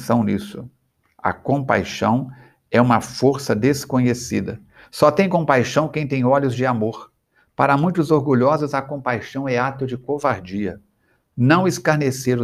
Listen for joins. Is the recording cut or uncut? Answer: uncut